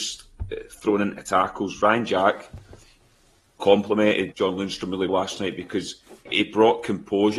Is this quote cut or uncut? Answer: cut